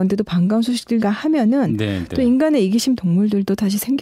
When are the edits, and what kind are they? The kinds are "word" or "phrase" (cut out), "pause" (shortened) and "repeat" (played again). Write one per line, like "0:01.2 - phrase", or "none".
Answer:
0:01.0 - word
0:03.0 - phrase